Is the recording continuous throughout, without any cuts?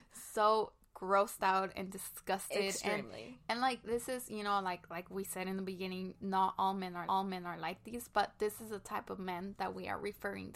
no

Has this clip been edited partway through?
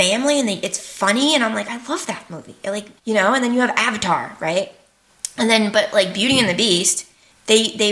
yes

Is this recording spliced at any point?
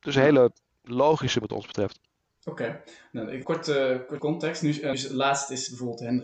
yes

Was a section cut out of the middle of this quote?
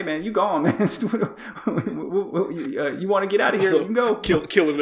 no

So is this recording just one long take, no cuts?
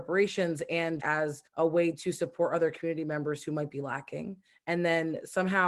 no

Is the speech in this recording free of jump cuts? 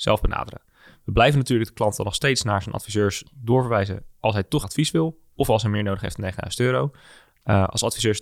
no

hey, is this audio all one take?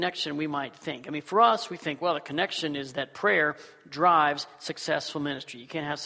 yes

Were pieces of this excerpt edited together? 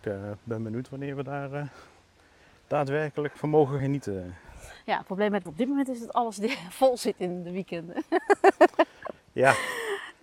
yes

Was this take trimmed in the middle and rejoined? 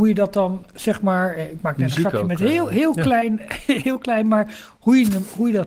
no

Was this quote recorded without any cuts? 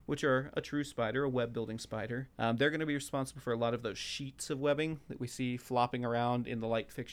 no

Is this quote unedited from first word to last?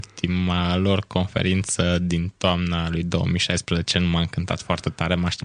yes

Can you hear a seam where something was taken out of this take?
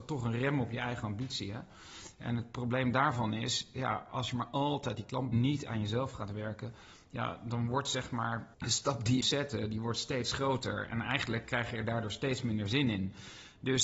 yes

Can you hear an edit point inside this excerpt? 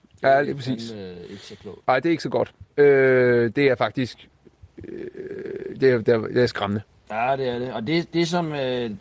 yes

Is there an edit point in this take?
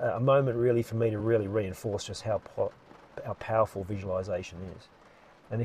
no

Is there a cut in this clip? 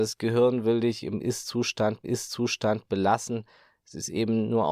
yes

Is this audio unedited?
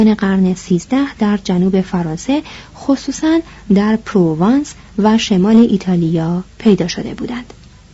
yes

